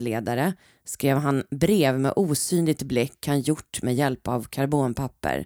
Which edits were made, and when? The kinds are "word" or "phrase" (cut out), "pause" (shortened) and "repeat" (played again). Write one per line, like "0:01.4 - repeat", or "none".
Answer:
none

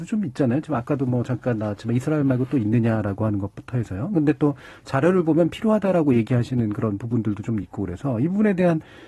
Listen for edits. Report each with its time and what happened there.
none

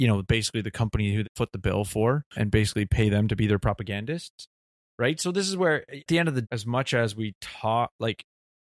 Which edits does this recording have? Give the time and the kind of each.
0:01.2 - word
0:02.3 - word
0:06.1 - word
0:06.4 - word

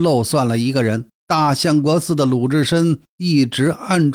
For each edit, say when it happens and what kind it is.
0:01.2 - pause

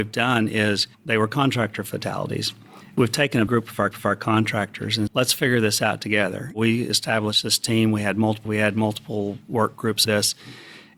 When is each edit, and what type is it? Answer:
0:00.9 - pause
0:03.5 - word
0:03.9 - repeat
0:05.1 - word
0:08.5 - word
0:10.1 - word

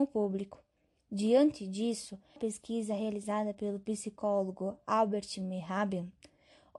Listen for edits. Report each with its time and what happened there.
0:02.4 - phrase

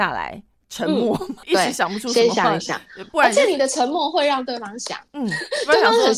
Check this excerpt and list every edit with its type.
0:05.1 - pause

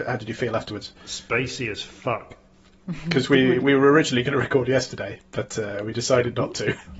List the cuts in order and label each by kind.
0:01.0 - pause

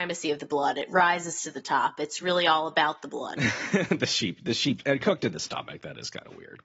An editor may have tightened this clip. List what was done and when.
none

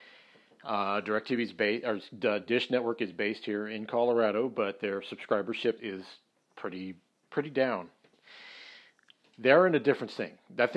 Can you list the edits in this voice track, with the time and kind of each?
0:05.8 - word

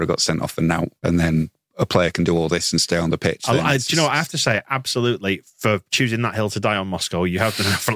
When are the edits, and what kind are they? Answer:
0:01.0 - pause

